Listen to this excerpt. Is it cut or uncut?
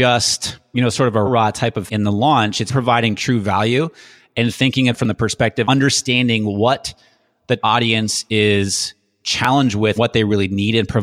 cut